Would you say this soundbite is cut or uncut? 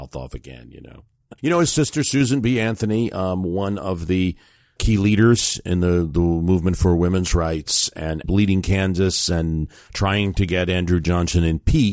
cut